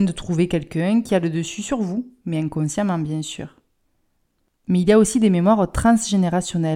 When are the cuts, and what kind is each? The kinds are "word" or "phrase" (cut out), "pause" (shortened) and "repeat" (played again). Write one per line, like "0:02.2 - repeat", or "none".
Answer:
none